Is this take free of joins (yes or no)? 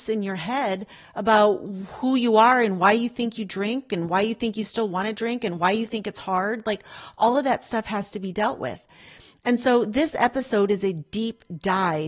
yes